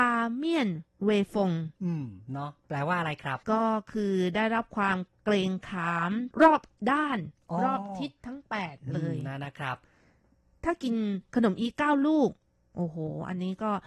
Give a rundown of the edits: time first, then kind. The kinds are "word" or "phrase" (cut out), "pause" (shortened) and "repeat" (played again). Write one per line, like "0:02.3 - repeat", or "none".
0:03.4 - pause
0:06.3 - pause

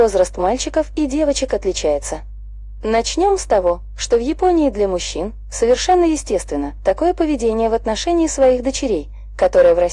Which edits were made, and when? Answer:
none

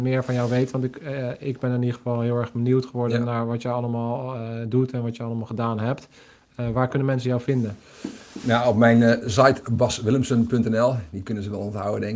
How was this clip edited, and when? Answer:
none

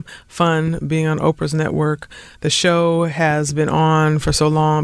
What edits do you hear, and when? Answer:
none

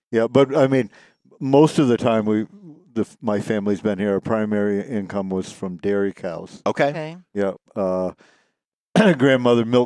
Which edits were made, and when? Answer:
none

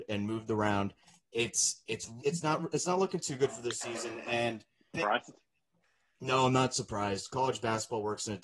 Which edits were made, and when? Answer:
0:02.2 - word
0:04.9 - word

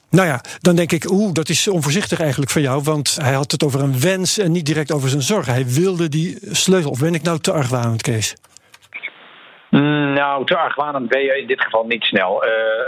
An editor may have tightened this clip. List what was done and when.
0:03.2 - word

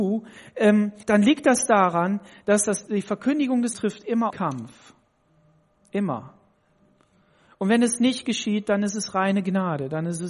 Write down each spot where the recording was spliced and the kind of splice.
0:01.0 - word
0:02.9 - word
0:03.7 - word
0:04.3 - word

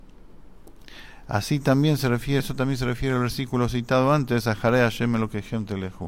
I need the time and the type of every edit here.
0:02.4 - word

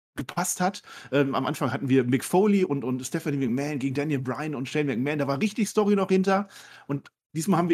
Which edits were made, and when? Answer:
none

